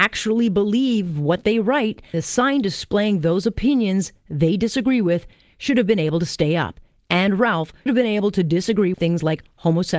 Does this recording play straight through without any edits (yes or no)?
no